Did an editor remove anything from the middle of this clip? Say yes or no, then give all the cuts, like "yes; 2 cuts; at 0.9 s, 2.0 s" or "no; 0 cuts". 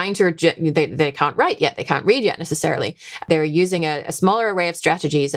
no; 0 cuts